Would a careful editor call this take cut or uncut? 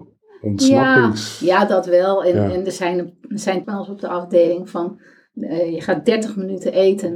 cut